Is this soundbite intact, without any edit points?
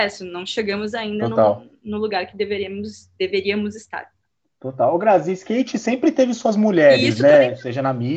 yes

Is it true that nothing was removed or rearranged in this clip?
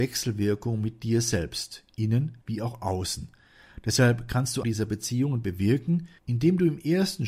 no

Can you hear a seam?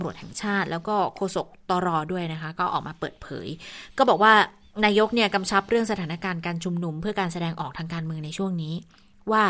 no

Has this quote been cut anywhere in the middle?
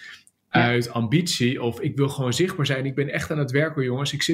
no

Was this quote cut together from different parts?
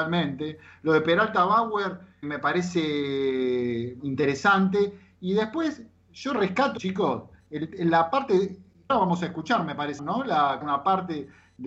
yes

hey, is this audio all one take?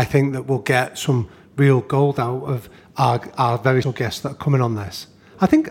no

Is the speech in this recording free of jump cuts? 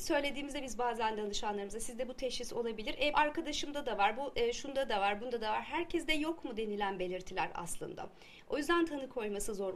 no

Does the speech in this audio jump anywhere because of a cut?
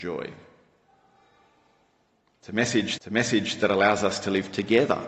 yes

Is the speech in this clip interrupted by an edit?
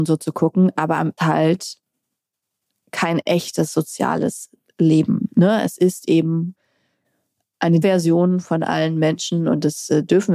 yes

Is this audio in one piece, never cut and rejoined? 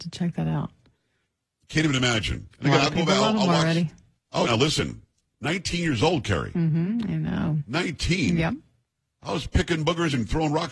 no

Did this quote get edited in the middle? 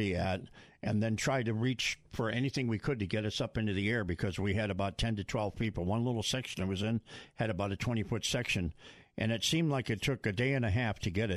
no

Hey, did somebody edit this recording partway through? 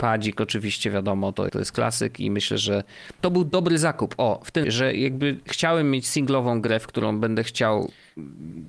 yes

